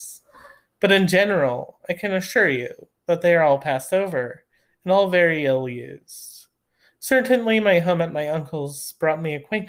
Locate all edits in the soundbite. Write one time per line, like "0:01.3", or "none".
none